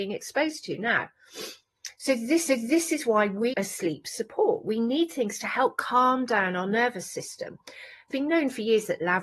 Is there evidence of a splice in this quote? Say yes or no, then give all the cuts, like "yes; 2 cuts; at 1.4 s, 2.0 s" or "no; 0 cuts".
yes; 3 cuts; at 2.5 s, 3.5 s, 8.1 s